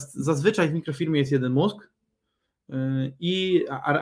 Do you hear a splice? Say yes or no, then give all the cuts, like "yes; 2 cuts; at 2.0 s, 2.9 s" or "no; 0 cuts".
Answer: no; 0 cuts